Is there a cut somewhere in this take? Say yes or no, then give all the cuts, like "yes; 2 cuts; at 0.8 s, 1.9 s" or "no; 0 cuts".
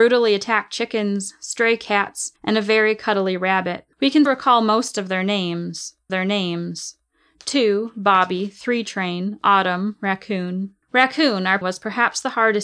yes; 6 cuts; at 2.4 s, 3.9 s, 4.3 s, 6.1 s, 10.8 s, 11.6 s